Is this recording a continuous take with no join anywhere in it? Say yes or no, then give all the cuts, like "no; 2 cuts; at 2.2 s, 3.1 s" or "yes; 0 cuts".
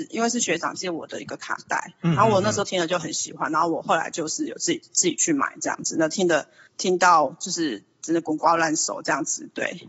no; 1 cut; at 6.7 s